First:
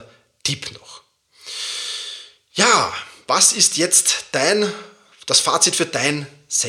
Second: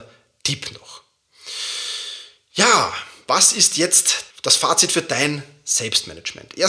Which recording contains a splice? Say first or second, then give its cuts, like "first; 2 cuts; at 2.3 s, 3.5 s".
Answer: second; 1 cut; at 4.3 s